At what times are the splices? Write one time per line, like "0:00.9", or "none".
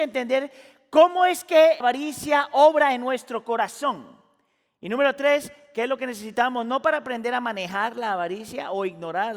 0:01.8